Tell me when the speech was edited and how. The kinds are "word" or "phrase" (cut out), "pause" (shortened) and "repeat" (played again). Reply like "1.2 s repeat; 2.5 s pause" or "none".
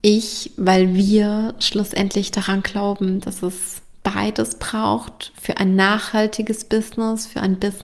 none